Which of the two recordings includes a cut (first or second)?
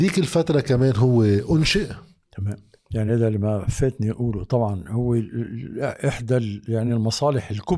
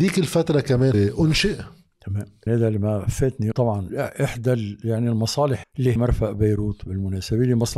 second